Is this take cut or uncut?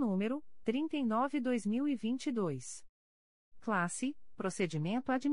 uncut